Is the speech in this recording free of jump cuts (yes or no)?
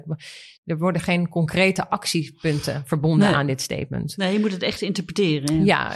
yes